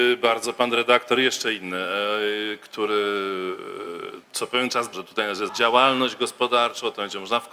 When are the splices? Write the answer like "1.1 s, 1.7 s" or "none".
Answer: 4.2 s, 4.9 s, 5.5 s